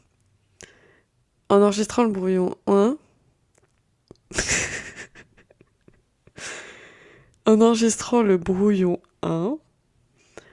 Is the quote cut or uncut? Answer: uncut